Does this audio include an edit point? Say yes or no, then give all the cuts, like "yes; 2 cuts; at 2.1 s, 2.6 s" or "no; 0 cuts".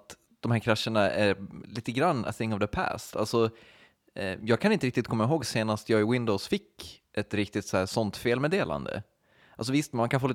no; 0 cuts